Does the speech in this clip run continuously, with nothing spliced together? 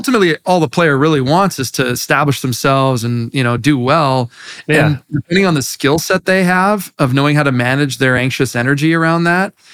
yes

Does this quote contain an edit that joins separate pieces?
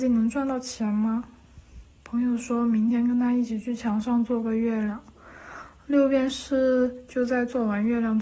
yes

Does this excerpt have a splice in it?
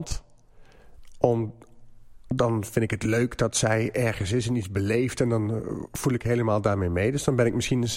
no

